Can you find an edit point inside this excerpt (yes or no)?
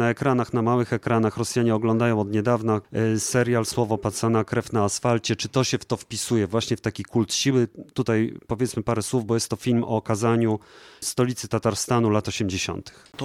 no